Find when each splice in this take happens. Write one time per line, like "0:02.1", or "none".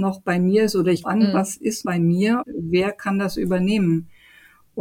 0:01.0
0:01.8
0:02.4